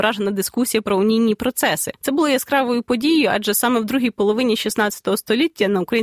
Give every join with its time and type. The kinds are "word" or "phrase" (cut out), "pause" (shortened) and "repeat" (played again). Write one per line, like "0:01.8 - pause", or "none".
0:02.0 - pause